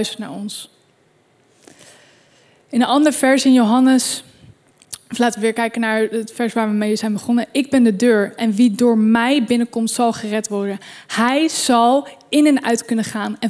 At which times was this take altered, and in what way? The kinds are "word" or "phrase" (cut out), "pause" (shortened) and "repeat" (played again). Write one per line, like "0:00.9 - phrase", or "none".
none

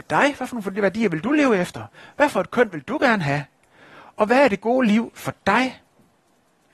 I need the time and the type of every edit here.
none

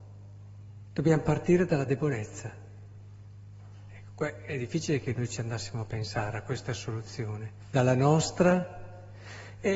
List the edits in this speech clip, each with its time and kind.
0:07.6 - pause

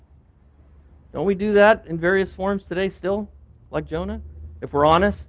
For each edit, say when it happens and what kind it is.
none

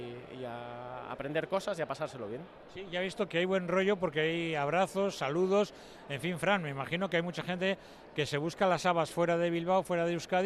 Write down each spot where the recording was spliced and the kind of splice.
0:03.3 - word

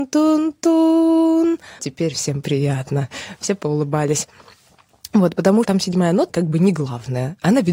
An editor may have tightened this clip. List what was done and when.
0:01.8 - word
0:05.6 - word
0:06.3 - word

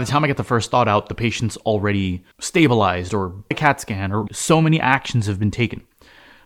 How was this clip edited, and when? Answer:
0:02.3 - pause
0:03.5 - word
0:04.3 - word

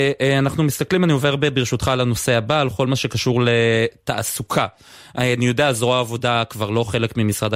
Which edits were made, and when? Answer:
none

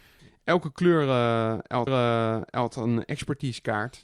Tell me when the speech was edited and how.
0:01.9 - repeat

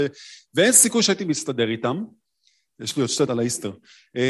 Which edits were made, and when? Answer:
0:03.3 - word

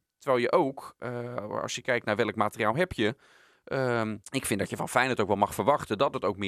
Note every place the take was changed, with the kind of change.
0:04.2 - pause

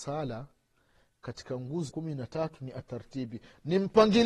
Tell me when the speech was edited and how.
0:01.9 - word

